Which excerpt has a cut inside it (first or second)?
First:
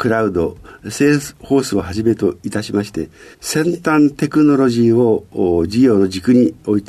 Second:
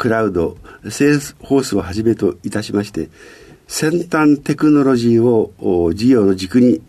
first